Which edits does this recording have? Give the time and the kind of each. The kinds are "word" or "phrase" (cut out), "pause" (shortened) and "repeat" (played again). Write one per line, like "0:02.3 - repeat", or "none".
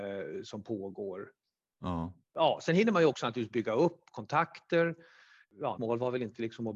0:05.8 - word